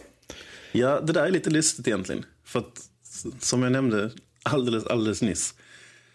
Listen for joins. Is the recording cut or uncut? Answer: uncut